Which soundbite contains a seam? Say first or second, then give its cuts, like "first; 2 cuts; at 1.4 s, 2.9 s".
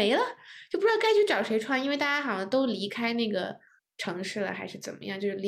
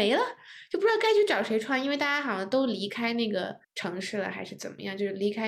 second; 1 cut; at 3.6 s